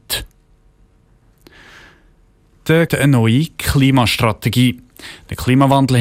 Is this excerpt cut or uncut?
cut